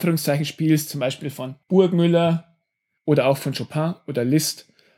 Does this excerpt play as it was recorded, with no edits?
no; 1 cut; at 1.6 s

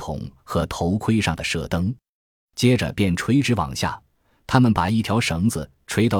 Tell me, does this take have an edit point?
no; 0 cuts

